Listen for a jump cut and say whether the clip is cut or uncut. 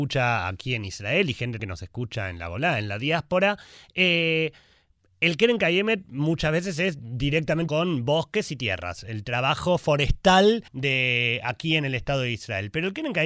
cut